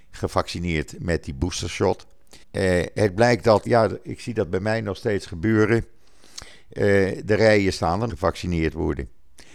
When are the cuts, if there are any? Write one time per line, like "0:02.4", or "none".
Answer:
0:02.4
0:03.7
0:08.1